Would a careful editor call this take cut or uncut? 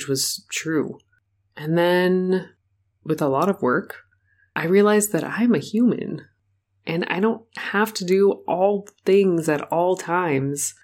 uncut